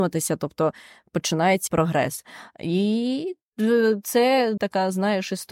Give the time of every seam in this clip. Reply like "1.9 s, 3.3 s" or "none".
1.7 s, 4.6 s